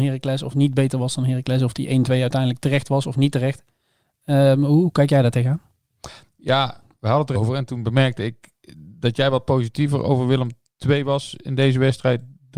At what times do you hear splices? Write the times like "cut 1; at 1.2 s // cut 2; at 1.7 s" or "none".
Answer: cut 1; at 7.3 s